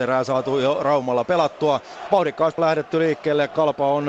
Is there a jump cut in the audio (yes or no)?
yes